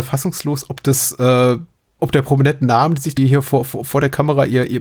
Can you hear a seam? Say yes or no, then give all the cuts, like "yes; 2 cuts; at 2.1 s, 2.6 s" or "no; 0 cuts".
yes; 2 cuts; at 2.0 s, 3.2 s